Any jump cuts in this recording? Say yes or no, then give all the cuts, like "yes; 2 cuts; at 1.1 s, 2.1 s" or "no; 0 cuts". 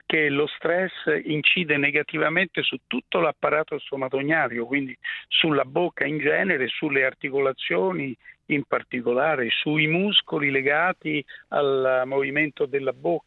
no; 0 cuts